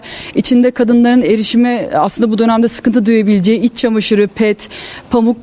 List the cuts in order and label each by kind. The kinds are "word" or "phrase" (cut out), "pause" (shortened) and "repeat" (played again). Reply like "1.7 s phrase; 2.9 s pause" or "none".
none